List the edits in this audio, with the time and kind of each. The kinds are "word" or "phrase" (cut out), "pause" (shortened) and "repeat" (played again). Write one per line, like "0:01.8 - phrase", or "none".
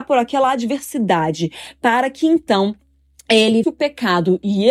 0:03.6 - word